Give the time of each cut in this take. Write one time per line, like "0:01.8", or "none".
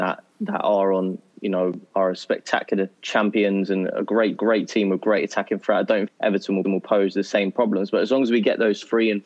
0:02.9
0:04.4
0:06.1
0:06.6